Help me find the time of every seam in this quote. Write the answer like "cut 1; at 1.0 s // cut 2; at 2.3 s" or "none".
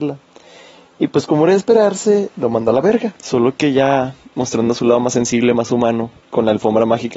cut 1; at 3.2 s // cut 2; at 6.2 s